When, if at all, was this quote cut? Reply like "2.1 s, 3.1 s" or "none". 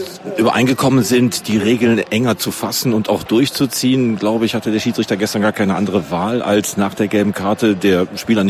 none